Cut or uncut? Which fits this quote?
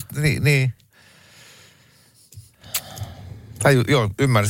uncut